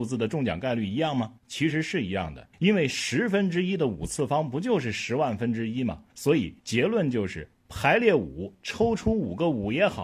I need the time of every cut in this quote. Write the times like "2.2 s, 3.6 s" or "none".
1.4 s, 2.5 s, 6.1 s, 6.6 s